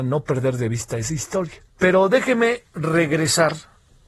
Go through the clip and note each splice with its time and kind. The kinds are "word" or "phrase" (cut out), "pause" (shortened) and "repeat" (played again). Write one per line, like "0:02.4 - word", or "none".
0:01.7 - pause